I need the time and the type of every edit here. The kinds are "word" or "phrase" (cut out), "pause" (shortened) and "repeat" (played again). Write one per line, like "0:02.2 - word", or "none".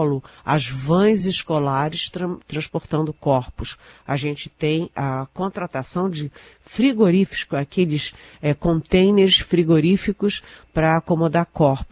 none